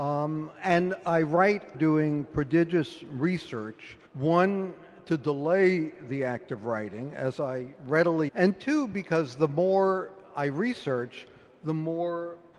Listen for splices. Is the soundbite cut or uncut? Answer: cut